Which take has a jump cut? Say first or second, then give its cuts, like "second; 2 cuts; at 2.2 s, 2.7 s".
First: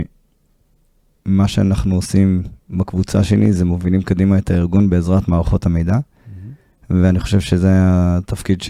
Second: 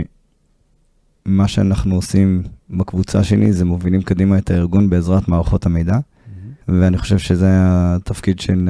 second; 1 cut; at 6.6 s